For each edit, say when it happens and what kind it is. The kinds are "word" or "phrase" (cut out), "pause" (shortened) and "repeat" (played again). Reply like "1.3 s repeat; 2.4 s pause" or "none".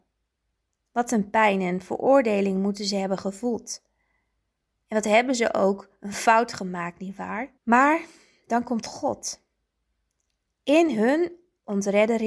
7.6 s pause